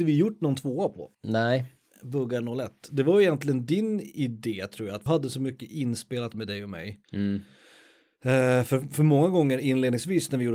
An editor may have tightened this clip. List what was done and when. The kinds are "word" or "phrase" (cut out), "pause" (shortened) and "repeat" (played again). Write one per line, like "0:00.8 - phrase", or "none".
0:01.1 - pause
0:05.1 - word
0:06.3 - word
0:07.0 - pause